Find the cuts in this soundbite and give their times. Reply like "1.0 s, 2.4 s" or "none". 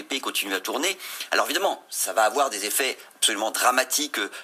none